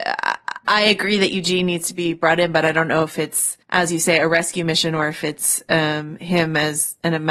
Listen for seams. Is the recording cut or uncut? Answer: cut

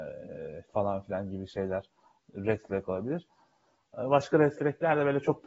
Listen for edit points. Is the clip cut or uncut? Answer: uncut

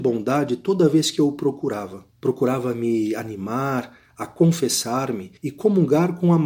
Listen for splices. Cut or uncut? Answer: cut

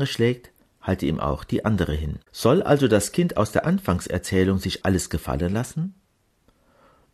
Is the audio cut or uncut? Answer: cut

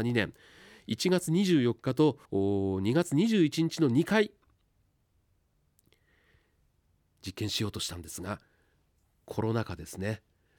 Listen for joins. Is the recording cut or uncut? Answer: cut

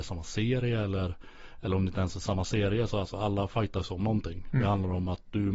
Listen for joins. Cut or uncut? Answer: uncut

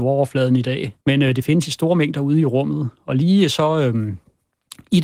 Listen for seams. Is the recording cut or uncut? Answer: cut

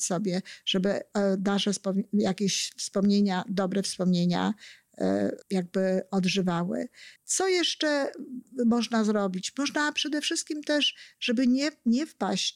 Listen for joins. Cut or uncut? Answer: cut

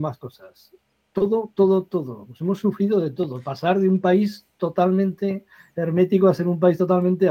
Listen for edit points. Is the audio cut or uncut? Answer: uncut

